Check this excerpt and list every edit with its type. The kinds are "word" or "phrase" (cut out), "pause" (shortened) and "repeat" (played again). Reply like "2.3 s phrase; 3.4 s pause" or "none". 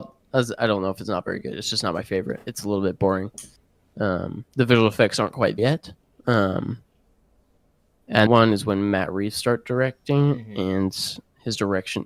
4.5 s pause; 5.6 s word; 8.3 s phrase